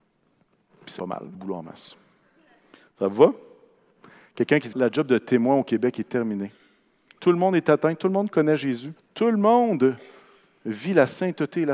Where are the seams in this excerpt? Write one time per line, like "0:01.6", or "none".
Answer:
0:01.0
0:01.3
0:04.7
0:09.0